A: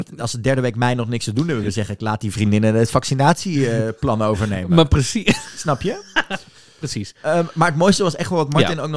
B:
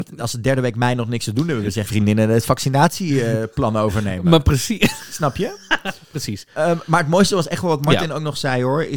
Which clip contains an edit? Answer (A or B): B